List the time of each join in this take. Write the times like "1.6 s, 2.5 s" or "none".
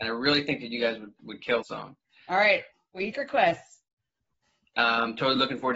1.2 s, 1.6 s, 3.1 s